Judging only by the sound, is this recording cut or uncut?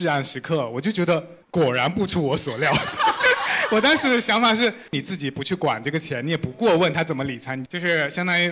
cut